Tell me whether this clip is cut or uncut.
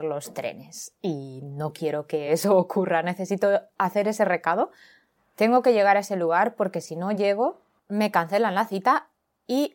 uncut